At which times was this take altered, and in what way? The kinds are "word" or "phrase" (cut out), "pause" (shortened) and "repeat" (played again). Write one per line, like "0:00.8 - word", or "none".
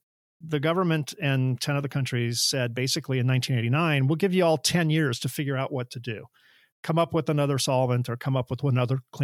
none